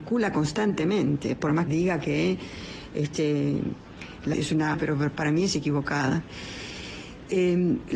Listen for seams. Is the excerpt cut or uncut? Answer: cut